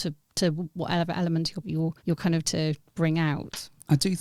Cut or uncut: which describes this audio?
cut